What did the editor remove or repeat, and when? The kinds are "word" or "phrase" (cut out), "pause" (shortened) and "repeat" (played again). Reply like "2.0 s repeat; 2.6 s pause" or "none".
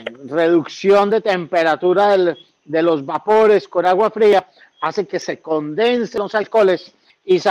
none